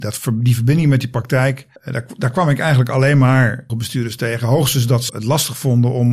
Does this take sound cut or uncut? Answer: cut